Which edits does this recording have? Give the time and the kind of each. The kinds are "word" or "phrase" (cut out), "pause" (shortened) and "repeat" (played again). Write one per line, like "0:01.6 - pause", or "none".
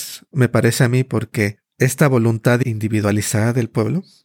none